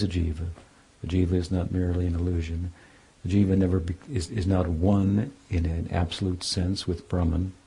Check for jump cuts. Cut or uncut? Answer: uncut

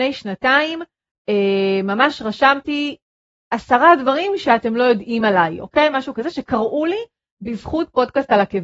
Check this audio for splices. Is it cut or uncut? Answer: uncut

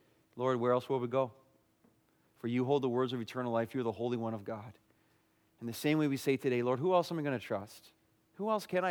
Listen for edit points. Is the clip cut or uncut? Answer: uncut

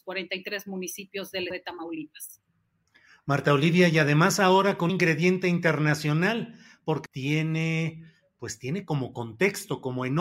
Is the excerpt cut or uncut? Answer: cut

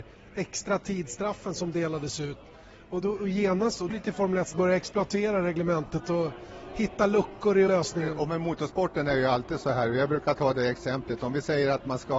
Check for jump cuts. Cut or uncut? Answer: cut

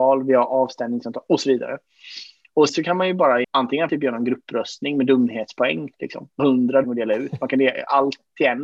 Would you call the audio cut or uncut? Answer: cut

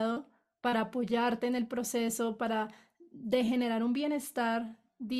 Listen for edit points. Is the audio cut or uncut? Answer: uncut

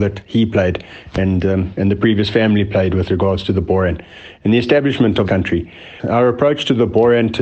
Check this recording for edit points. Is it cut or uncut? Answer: cut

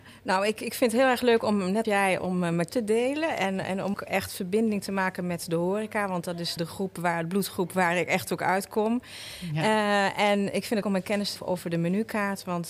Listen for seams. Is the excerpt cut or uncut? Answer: cut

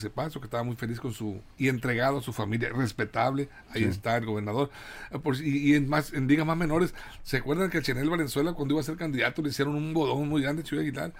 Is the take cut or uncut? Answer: cut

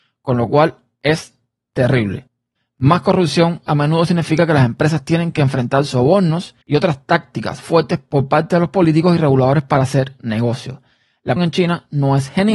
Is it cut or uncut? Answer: cut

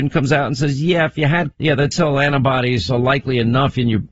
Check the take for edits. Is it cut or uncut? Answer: cut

